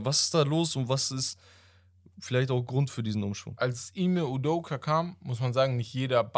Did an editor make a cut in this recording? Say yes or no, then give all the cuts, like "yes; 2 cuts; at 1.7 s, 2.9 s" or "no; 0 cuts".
no; 0 cuts